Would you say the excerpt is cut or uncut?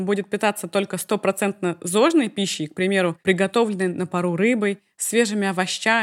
cut